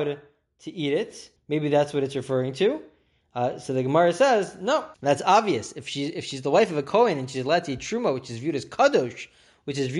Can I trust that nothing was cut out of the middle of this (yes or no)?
no